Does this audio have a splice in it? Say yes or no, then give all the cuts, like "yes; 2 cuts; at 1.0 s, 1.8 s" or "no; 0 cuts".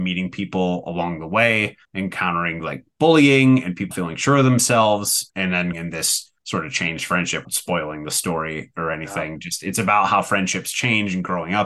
yes; 6 cuts; at 1.8 s, 3.9 s, 5.3 s, 5.7 s, 6.4 s, 7.4 s